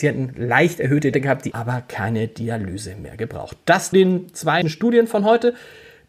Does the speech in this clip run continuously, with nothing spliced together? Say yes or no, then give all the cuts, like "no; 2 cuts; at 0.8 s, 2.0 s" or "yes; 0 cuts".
no; 4 cuts; at 1.1 s, 1.5 s, 3.9 s, 4.6 s